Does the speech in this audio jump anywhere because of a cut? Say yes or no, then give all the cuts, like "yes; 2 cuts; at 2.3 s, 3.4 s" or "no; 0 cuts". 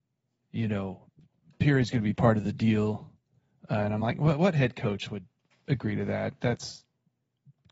no; 0 cuts